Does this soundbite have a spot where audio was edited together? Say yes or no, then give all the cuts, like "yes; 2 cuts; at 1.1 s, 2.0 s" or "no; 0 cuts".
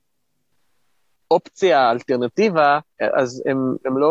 yes; 1 cut; at 2.9 s